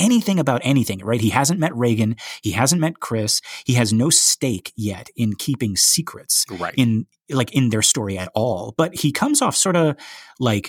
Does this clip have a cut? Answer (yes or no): no